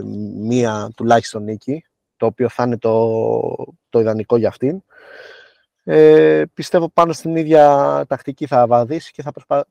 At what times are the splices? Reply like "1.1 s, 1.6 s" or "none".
3.8 s